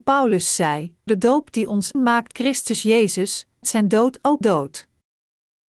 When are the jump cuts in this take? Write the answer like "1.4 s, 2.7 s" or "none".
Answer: 1.1 s, 1.9 s, 2.3 s, 3.6 s, 4.4 s